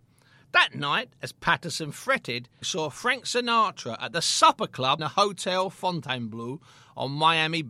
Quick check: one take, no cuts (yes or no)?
no